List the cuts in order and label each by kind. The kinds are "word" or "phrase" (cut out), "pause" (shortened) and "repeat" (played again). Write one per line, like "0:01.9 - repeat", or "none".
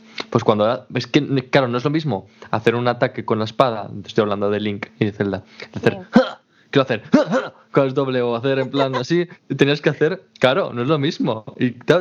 none